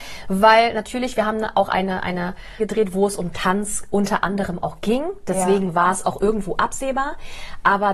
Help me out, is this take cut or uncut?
cut